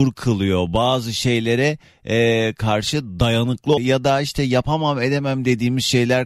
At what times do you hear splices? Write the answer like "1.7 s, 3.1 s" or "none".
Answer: 3.8 s